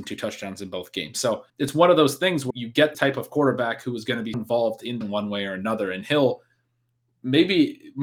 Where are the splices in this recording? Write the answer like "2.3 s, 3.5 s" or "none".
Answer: 1.5 s, 2.5 s, 2.9 s, 4.3 s, 5.0 s